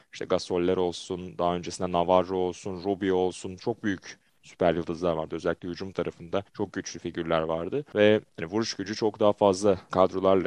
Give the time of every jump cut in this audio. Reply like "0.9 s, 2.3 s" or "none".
6.5 s, 8.3 s